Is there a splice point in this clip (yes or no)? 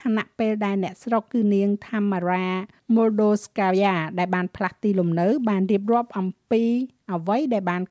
no